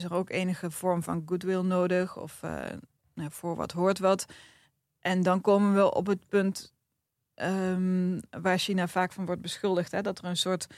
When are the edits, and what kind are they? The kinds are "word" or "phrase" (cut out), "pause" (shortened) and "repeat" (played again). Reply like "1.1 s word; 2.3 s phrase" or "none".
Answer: none